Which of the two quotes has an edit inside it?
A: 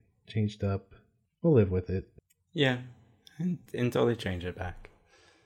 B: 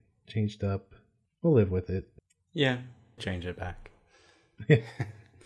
B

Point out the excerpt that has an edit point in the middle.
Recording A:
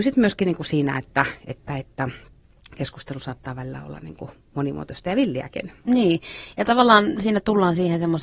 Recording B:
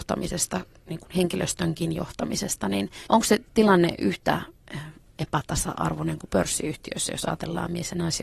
B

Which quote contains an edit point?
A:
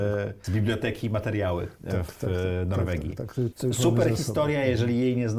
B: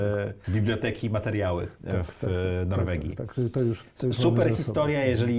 A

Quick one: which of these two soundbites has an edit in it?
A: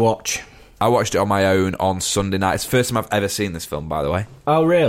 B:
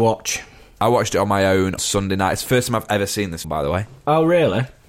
B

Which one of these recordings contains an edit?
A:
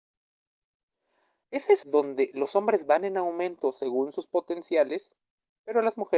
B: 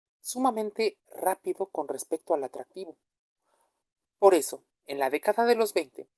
A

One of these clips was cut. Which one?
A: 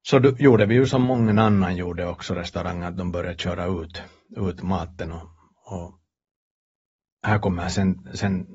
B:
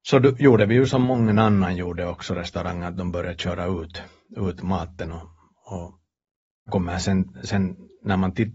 B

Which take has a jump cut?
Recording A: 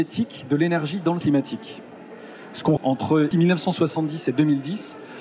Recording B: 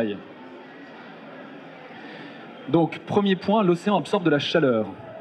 A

